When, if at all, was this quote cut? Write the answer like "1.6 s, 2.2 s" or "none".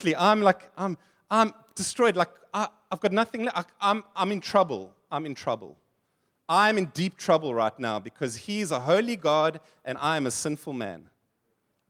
none